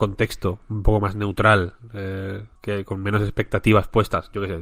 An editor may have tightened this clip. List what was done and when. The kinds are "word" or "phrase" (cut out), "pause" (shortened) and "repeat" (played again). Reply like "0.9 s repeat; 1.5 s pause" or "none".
2.6 s pause